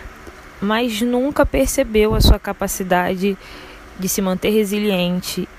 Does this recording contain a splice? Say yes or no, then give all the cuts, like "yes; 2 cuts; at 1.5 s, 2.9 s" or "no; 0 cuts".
no; 0 cuts